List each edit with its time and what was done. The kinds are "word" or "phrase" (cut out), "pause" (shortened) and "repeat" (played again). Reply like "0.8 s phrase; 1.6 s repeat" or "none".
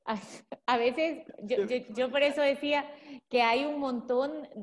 none